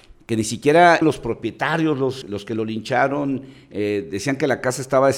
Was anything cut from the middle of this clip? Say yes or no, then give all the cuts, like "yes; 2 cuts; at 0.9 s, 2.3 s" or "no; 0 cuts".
yes; 2 cuts; at 1.0 s, 2.2 s